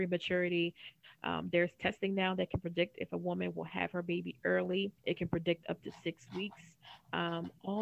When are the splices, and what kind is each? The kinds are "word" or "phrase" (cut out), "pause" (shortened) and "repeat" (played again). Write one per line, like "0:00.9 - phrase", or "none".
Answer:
0:05.0 - pause

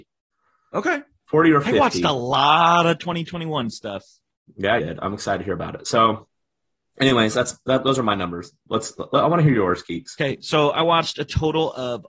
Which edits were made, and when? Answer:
0:04.8 - word

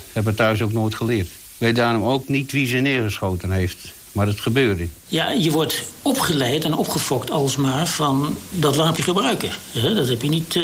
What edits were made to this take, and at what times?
0:08.5 - word
0:09.0 - word

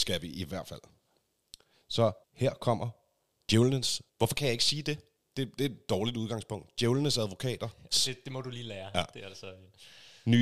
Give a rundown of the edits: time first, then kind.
0:02.2 - pause
0:04.1 - pause
0:05.2 - pause

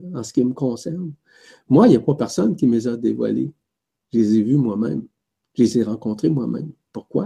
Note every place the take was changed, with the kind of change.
none

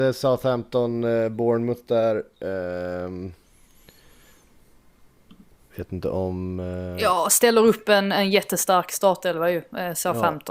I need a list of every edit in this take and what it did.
none

